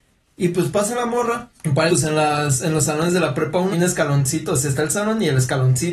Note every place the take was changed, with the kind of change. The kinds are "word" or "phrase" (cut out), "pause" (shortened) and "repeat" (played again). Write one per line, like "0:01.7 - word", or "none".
0:01.5 - pause
0:01.9 - word
0:03.7 - word